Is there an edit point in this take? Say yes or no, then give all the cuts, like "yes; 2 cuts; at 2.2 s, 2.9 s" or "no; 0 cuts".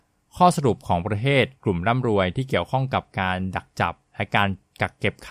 no; 0 cuts